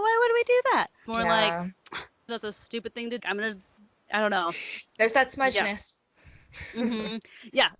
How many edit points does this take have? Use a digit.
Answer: 4